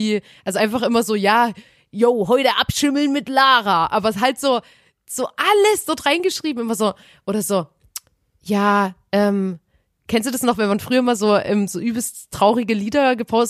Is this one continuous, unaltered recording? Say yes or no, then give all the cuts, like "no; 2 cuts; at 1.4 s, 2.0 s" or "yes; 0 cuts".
yes; 0 cuts